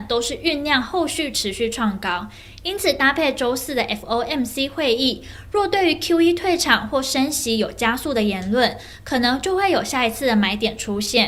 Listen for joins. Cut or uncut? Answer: uncut